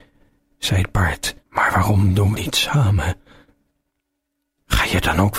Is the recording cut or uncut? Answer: cut